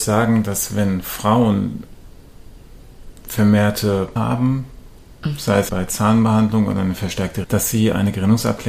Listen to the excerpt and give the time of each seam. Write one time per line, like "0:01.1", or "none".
0:04.2
0:05.7
0:07.4